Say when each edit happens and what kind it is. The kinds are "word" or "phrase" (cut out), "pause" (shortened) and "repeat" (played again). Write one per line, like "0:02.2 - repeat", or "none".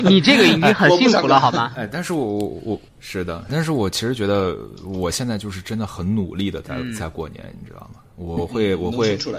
0:02.9 - pause
0:03.5 - phrase
0:08.4 - word